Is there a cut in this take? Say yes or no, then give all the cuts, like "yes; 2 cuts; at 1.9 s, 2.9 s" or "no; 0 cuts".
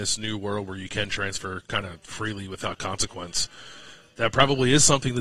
no; 0 cuts